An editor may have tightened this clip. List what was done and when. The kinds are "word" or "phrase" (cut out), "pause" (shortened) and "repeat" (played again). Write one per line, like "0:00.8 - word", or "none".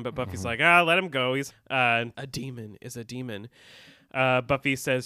0:01.5 - word
0:02.1 - phrase